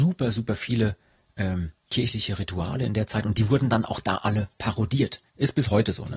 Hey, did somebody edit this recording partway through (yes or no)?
no